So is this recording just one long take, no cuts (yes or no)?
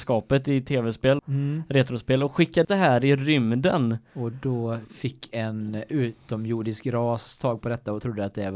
no